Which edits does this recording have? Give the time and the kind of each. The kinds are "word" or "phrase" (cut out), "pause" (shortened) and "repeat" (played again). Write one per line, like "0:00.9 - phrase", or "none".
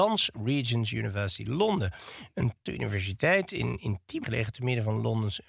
0:02.7 - word
0:04.2 - word